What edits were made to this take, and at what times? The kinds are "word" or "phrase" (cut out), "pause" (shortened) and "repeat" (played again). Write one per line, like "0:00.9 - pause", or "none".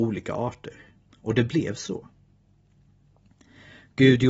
none